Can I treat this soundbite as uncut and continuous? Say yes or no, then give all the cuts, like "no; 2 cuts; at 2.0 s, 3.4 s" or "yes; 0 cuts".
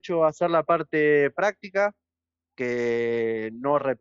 yes; 0 cuts